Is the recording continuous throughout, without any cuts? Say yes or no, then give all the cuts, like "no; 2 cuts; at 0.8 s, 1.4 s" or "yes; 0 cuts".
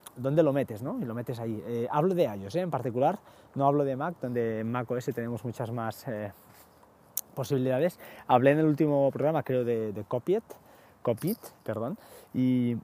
yes; 0 cuts